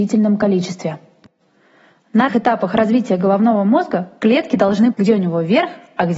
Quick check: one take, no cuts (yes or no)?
no